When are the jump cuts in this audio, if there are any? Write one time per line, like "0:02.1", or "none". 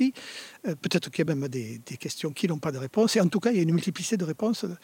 none